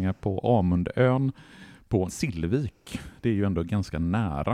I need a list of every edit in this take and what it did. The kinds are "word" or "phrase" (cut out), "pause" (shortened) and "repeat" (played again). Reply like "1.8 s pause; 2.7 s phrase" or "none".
2.1 s word